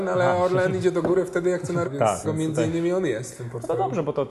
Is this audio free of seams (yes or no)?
no